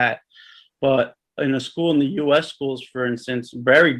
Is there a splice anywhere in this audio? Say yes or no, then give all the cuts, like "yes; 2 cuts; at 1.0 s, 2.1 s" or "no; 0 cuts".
no; 0 cuts